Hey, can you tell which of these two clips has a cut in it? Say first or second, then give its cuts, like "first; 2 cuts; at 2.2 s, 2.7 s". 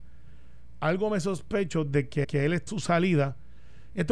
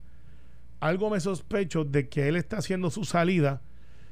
first; 2 cuts; at 2.2 s, 2.7 s